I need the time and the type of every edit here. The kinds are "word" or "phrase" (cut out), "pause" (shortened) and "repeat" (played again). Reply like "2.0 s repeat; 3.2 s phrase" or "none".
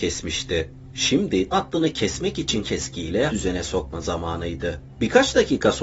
1.5 s word; 2.6 s word; 3.3 s word